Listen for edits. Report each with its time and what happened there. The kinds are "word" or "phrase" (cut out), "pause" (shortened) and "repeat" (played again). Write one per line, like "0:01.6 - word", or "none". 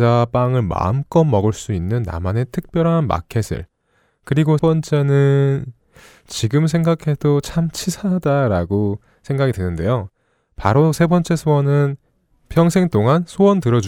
0:04.6 - word